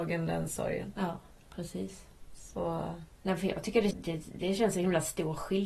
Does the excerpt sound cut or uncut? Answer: cut